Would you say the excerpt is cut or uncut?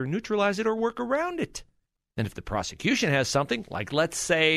cut